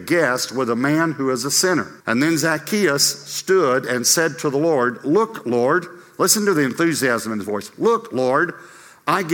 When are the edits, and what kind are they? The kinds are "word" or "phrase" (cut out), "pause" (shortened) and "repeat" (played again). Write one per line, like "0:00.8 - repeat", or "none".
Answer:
0:02.0 - pause